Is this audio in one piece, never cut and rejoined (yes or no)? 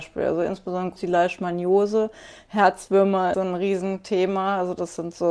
no